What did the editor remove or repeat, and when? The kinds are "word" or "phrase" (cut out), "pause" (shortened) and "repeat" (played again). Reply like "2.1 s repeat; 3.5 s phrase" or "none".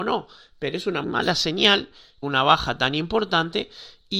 1.0 s word; 2.2 s phrase